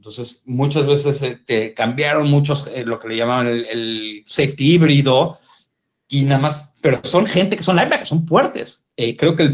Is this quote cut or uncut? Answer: uncut